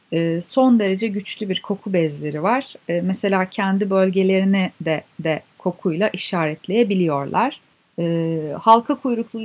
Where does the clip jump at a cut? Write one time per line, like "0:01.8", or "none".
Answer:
0:05.1
0:07.7